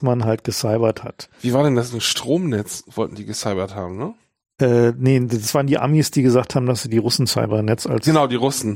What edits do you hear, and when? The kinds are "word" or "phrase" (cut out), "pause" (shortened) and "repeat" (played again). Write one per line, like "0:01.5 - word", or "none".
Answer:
none